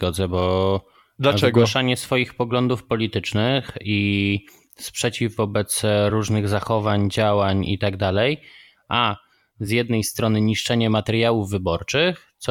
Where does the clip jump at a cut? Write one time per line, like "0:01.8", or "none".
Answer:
none